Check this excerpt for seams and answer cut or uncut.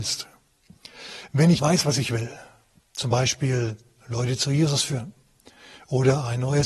cut